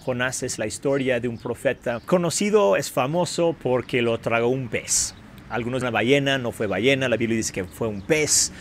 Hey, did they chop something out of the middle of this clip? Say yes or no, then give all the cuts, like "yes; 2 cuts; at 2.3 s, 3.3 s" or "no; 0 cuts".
yes; 2 cuts; at 2.0 s, 5.8 s